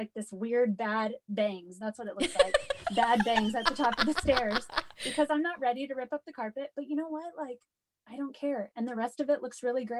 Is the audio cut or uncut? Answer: uncut